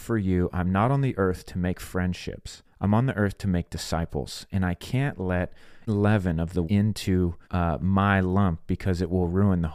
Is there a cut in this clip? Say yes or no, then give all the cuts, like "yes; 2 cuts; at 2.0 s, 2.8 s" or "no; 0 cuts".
yes; 4 cuts; at 2.6 s, 5.9 s, 6.6 s, 7.4 s